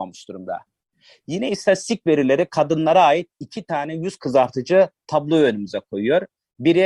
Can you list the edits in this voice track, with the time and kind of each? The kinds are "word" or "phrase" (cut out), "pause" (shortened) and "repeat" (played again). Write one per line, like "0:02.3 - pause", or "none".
none